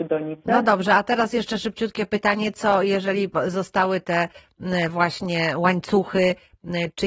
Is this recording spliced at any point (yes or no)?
no